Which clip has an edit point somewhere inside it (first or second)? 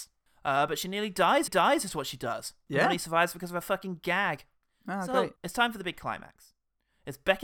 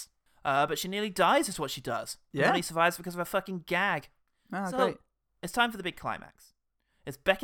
first